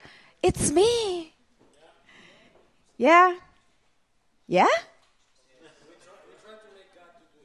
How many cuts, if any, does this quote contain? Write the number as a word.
zero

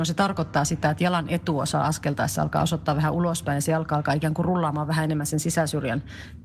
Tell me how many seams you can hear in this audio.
zero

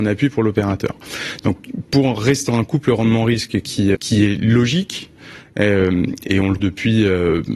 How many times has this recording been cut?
four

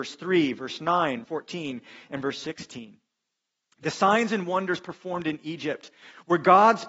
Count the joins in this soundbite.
one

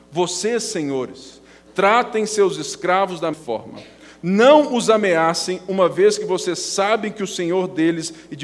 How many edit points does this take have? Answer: one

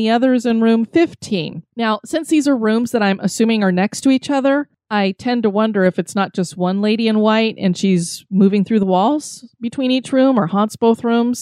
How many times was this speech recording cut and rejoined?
one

